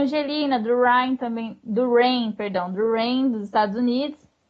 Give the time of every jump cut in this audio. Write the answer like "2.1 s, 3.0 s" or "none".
none